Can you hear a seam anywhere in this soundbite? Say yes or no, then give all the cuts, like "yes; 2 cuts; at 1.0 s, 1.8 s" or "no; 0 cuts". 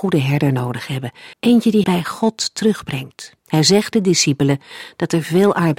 yes; 4 cuts; at 1.3 s, 1.8 s, 3.4 s, 3.9 s